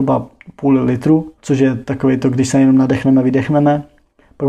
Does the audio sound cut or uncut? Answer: cut